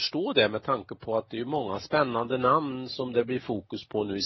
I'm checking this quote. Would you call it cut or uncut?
uncut